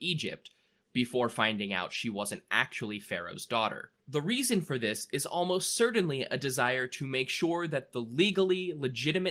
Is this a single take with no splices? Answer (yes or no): no